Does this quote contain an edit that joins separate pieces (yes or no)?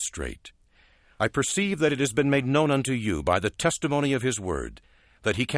no